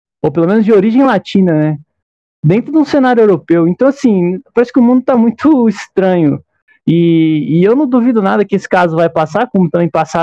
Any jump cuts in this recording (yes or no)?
no